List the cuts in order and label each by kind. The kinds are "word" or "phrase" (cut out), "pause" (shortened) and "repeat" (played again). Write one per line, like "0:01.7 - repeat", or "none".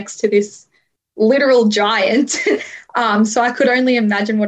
none

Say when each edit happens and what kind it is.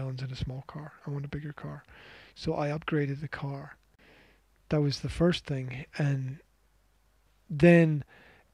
none

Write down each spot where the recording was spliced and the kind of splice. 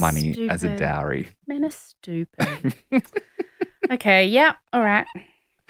0:01.7 - word

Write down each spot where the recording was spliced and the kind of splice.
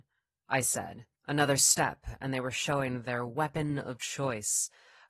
0:01.2 - pause

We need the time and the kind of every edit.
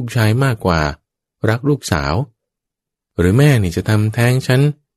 none

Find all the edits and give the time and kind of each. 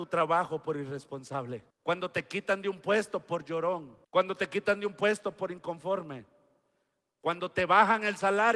0:01.7 - pause
0:04.0 - pause

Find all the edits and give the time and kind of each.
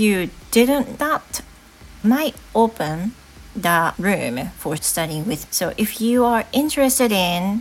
0:01.0 - word
0:02.0 - word
0:03.9 - word
0:04.8 - word
0:05.5 - phrase

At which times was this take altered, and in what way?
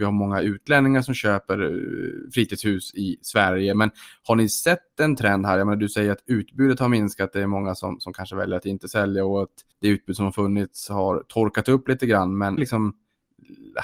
0:09.7 - pause
0:12.6 - phrase

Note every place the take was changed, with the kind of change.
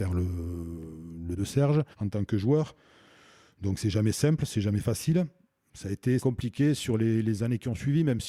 0:01.4 - phrase
0:01.9 - pause
0:06.2 - phrase

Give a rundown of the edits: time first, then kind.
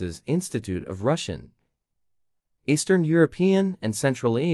none

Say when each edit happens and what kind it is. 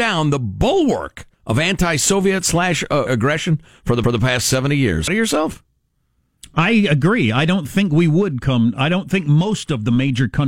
0:01.3 - pause
0:03.1 - word
0:04.0 - repeat
0:05.1 - phrase

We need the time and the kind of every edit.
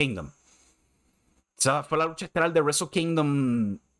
none

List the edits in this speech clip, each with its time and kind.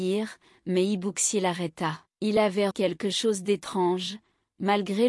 0:02.1 - pause
0:02.7 - word

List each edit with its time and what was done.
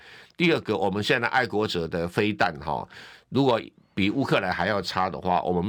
none

